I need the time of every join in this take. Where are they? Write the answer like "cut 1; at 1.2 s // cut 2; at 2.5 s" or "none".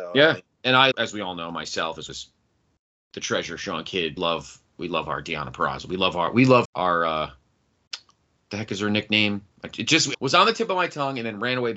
cut 1; at 0.9 s // cut 2; at 2.1 s // cut 3; at 4.2 s // cut 4; at 6.6 s // cut 5; at 10.1 s